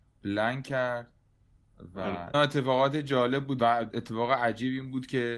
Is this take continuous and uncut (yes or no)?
no